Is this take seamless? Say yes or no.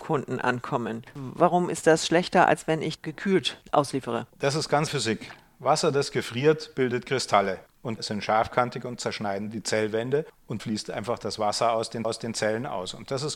no